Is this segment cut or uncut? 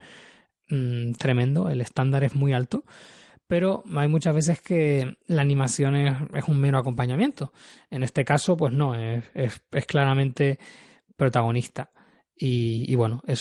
uncut